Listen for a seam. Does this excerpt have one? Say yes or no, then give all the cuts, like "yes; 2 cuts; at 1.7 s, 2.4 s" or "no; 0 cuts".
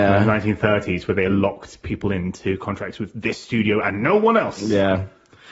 no; 0 cuts